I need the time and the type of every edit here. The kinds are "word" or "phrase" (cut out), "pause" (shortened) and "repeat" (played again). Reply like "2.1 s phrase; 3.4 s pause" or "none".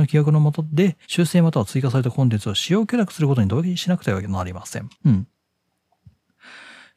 1.0 s pause; 4.9 s pause